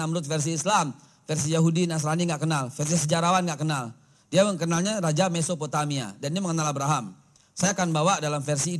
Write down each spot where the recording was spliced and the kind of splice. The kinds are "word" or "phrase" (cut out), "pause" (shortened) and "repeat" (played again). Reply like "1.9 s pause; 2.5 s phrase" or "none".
none

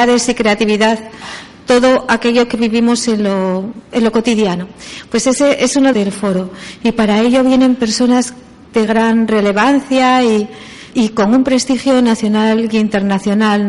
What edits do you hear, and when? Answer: 5.9 s phrase; 10.9 s word

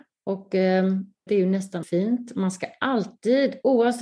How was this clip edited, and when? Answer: 1.3 s word; 1.8 s word

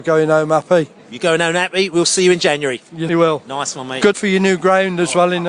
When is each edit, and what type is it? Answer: 1.0 s pause; 3.1 s word; 4.1 s word

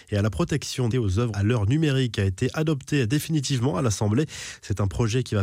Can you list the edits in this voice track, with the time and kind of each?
0.9 s word; 1.3 s word

